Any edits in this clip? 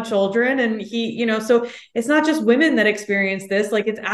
no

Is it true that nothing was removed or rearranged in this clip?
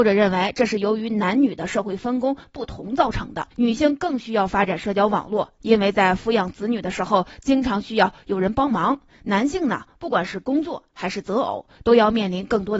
no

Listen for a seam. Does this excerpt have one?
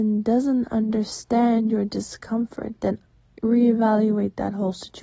no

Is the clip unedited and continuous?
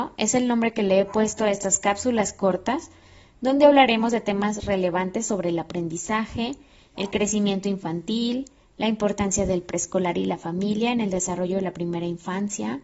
yes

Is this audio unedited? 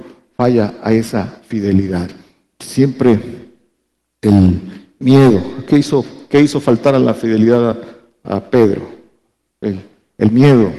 yes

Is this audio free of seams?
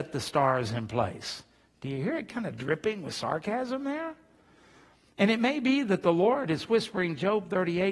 yes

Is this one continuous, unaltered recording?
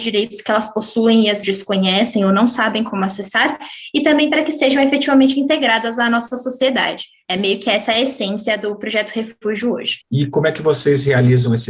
no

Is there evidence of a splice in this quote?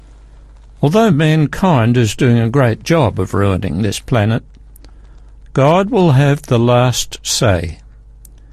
no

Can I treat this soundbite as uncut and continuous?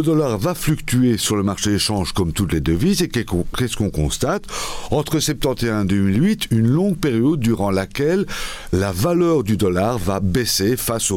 yes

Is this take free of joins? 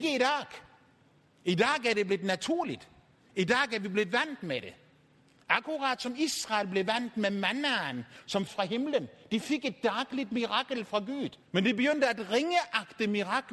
no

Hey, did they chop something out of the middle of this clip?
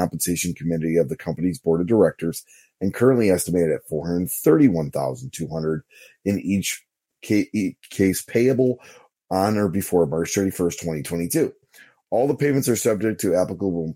no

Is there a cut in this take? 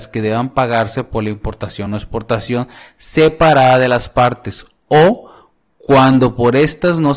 no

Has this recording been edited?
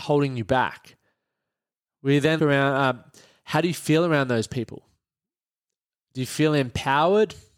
yes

